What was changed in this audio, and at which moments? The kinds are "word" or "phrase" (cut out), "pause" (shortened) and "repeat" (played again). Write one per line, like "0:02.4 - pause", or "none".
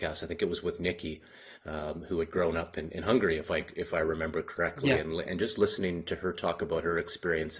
none